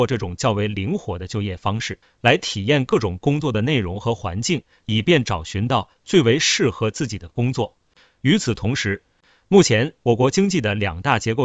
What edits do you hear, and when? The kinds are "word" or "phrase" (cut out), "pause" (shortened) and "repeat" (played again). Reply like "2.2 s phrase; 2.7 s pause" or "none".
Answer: 2.0 s pause